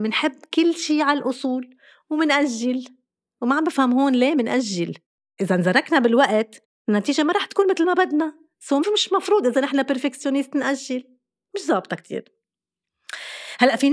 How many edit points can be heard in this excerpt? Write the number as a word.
zero